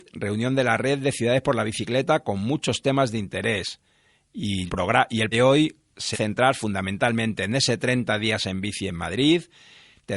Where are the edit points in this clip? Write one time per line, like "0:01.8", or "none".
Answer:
0:04.7
0:05.3
0:06.1